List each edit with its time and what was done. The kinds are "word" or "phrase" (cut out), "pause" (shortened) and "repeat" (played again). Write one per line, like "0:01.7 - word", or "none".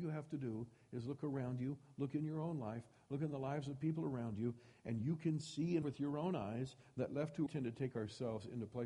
0:05.8 - word
0:07.5 - phrase